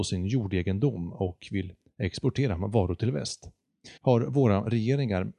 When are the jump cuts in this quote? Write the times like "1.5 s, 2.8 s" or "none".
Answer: 4.0 s

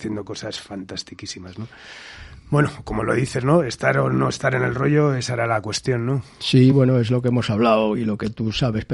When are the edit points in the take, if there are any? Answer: none

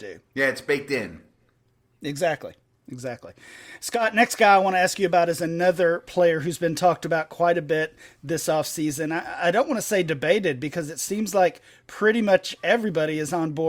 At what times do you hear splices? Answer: none

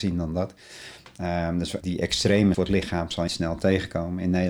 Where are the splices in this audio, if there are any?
1.8 s, 2.5 s, 3.3 s

